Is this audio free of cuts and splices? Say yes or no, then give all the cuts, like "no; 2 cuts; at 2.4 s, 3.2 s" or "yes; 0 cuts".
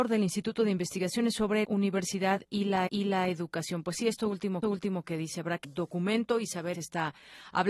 no; 5 cuts; at 1.6 s, 2.9 s, 4.6 s, 5.6 s, 6.7 s